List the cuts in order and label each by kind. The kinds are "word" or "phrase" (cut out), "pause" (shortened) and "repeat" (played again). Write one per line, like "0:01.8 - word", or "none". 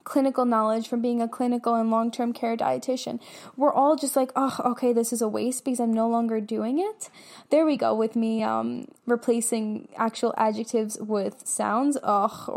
none

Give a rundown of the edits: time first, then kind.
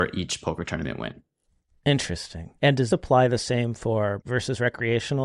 0:02.6 - pause
0:02.9 - word
0:04.2 - word

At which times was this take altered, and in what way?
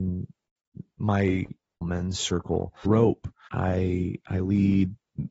0:01.8 - word
0:02.9 - word
0:03.5 - word

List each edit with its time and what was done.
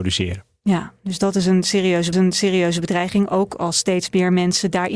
0:02.1 - repeat

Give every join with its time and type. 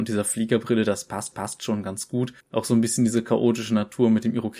0:01.3 - repeat
0:02.4 - pause

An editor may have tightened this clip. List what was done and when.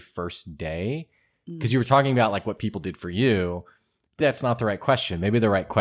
0:04.2 - word

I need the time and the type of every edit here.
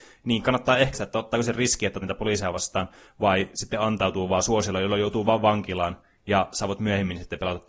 0:00.9 - word
0:02.0 - word

